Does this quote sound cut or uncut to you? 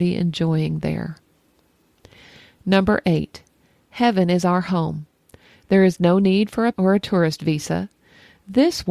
cut